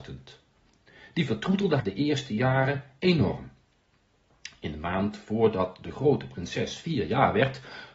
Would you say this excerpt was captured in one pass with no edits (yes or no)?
no